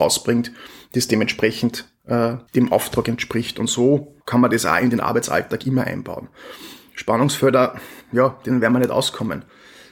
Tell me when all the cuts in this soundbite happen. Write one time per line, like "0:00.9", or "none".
0:02.5
0:04.2
0:08.0